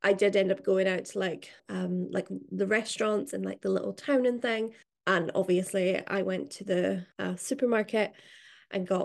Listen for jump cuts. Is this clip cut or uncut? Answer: cut